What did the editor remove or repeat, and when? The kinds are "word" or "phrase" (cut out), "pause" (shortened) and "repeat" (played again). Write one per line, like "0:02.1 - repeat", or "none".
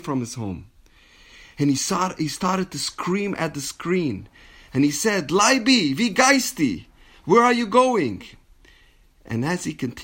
none